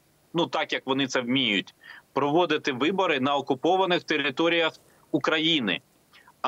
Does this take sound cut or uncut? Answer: uncut